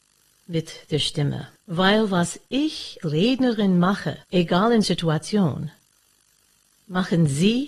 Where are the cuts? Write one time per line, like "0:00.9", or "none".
0:01.6
0:03.0
0:04.2
0:04.8